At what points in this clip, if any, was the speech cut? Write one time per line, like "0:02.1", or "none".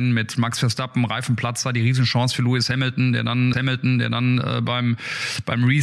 0:03.5